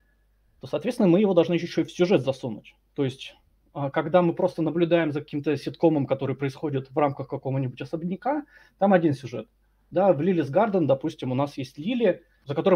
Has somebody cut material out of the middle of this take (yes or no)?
no